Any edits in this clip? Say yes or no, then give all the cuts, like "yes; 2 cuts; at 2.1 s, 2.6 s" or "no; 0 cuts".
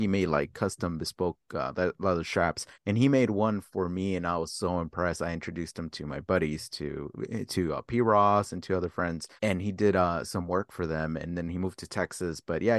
yes; 3 cuts; at 2.7 s, 3.7 s, 9.4 s